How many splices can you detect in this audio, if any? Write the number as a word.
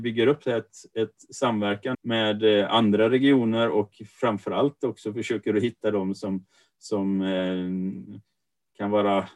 one